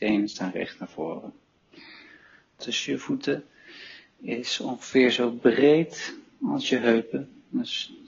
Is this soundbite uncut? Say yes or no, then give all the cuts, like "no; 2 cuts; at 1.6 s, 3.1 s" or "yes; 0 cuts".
no; 1 cut; at 2.6 s